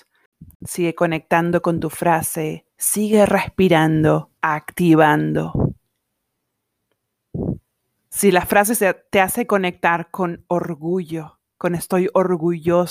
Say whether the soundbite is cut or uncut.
cut